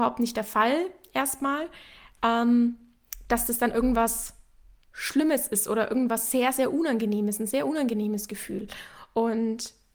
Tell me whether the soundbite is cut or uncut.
uncut